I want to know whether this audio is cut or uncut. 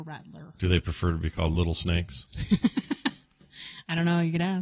uncut